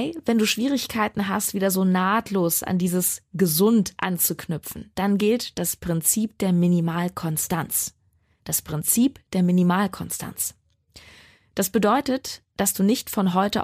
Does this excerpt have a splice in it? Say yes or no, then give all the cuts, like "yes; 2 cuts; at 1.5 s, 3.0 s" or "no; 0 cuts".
no; 0 cuts